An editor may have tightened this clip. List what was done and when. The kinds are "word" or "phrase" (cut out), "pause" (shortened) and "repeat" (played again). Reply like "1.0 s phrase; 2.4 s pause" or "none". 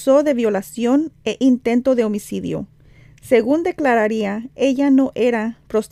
none